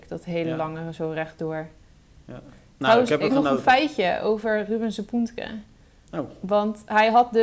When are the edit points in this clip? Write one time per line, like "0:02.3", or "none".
0:03.3